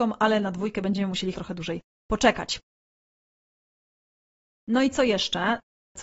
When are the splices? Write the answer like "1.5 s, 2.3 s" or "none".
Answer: 1.3 s

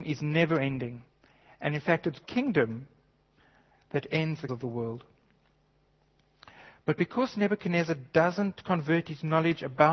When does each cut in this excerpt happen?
2.2 s, 4.5 s

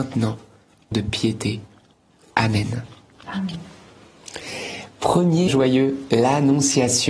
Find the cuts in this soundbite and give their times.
0.9 s, 5.5 s

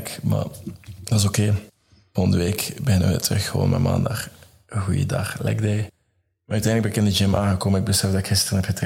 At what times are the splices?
none

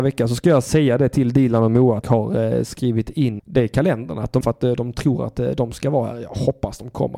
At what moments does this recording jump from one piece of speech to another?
2.0 s, 3.4 s, 4.4 s

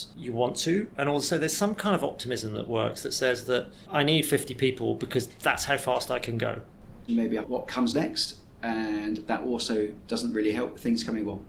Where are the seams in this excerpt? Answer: 7.1 s

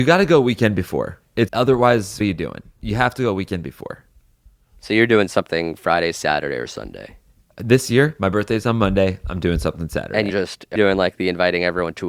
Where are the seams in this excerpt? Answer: 1.5 s, 2.2 s, 10.3 s, 10.8 s

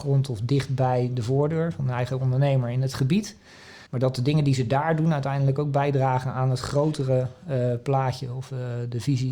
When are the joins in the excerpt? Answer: 3.9 s

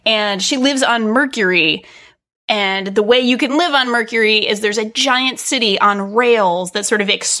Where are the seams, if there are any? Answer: none

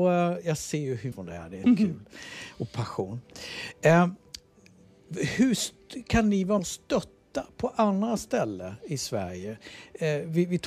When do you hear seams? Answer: 1.1 s, 1.6 s, 6.6 s

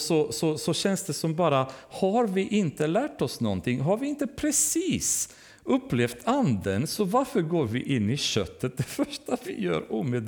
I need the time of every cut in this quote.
none

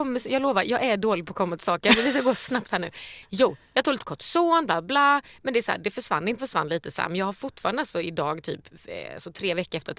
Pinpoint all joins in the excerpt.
6.4 s

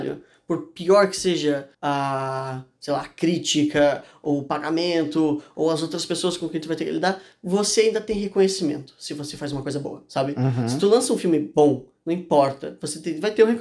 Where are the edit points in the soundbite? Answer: 1.7 s

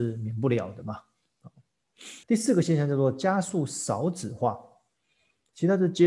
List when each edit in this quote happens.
2.2 s

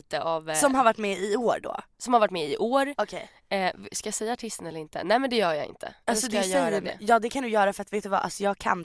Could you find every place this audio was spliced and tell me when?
none

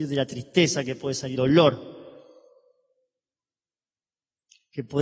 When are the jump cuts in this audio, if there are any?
1.3 s

